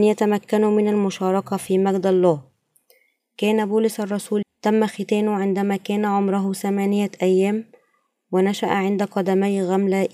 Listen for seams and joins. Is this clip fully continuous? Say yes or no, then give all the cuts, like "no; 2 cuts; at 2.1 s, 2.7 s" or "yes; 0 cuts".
no; 1 cut; at 4.4 s